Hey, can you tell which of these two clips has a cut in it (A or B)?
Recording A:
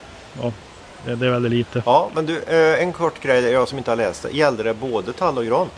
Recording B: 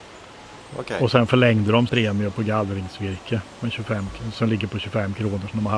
B